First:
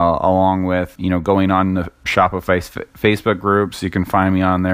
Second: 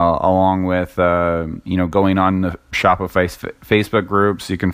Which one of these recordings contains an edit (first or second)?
first